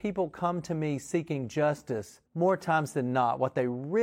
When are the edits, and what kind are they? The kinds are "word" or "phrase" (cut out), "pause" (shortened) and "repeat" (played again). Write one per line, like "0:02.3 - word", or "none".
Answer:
0:02.3 - pause